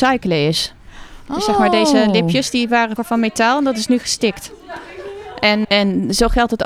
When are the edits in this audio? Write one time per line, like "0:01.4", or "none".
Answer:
0:03.0
0:05.6